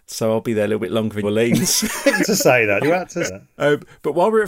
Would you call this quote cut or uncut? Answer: cut